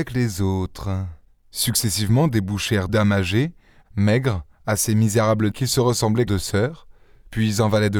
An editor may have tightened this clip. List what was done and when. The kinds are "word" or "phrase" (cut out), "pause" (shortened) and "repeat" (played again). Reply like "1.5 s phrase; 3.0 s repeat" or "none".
1.3 s pause; 2.9 s word; 4.5 s pause; 5.5 s phrase; 6.3 s word